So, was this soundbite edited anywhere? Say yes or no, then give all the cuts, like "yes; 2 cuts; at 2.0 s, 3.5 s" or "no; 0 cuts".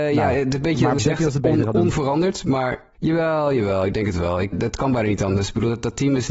yes; 3 cuts; at 1.0 s, 2.9 s, 4.5 s